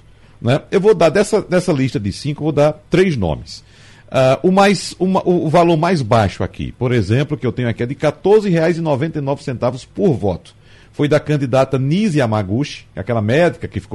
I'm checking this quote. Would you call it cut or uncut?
uncut